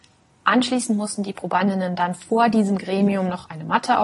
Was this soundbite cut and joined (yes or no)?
no